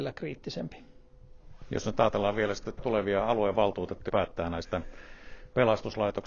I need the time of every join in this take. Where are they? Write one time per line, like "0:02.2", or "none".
0:02.8
0:04.1